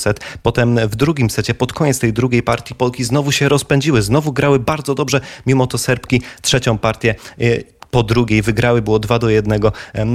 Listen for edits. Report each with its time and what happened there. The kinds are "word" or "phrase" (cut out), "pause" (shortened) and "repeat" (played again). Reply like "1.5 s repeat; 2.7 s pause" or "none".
none